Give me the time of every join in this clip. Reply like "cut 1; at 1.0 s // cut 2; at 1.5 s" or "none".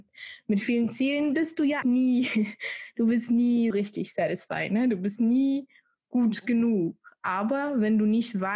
cut 1; at 1.8 s // cut 2; at 3.7 s